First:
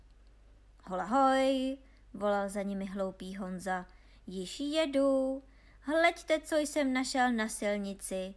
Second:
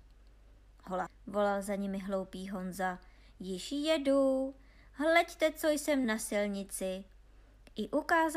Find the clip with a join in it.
second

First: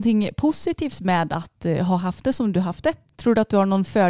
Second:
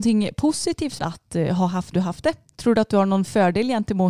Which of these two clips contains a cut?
second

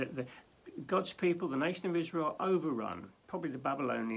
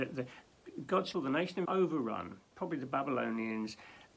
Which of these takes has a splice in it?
second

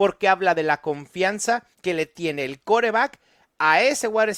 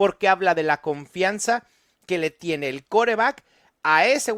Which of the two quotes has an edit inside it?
first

